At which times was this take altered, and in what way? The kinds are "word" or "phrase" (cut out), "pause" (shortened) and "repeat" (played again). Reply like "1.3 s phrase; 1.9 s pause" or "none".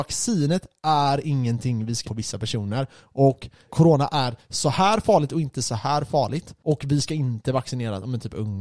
2.0 s word; 3.7 s word